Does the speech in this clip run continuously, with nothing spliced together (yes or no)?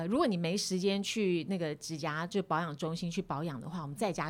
yes